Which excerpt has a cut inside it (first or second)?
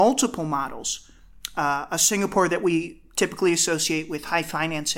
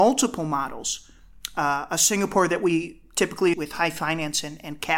second